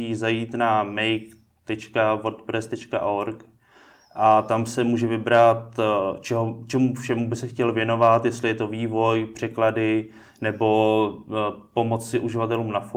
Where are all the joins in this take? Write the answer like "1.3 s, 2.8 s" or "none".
none

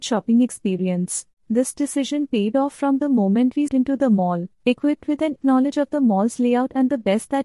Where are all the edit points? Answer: 1.3 s, 3.7 s, 4.5 s, 5.4 s

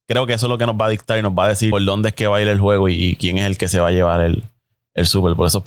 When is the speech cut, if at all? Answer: none

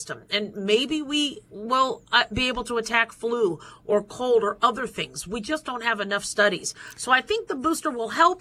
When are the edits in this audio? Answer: none

